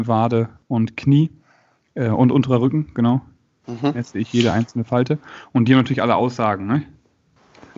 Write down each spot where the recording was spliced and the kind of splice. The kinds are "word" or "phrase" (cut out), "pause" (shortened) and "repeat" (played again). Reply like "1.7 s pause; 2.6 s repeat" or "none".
none